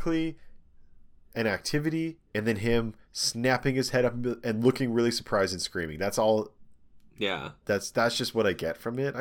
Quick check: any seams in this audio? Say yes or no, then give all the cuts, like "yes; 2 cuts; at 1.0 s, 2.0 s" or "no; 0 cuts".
no; 0 cuts